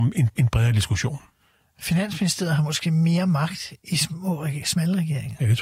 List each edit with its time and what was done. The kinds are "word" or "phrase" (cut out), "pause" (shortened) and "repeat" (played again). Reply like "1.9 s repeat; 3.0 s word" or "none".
none

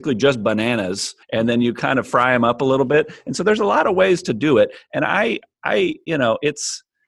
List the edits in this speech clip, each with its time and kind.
1.2 s pause

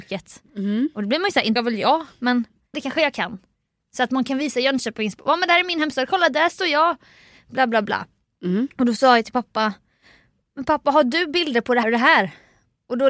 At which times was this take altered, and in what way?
1.6 s word; 2.7 s word; 11.8 s word

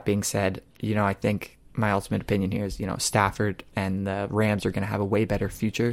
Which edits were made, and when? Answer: 1.7 s pause

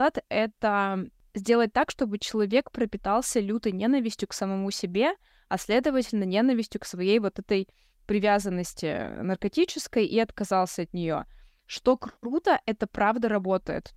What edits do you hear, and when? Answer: none

